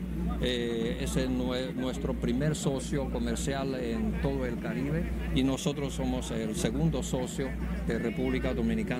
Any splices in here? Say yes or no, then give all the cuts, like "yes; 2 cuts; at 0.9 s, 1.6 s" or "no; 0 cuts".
no; 0 cuts